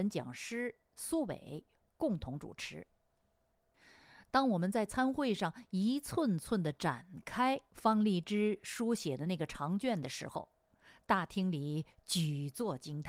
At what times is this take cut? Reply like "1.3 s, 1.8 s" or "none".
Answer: none